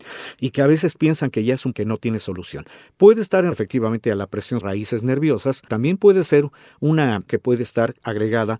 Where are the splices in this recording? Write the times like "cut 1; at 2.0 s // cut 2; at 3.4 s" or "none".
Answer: cut 1; at 1.7 s // cut 2; at 3.5 s // cut 3; at 4.6 s // cut 4; at 5.7 s // cut 5; at 7.3 s